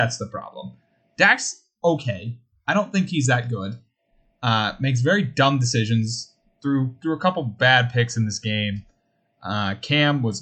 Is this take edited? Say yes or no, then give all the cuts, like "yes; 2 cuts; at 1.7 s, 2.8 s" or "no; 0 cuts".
no; 0 cuts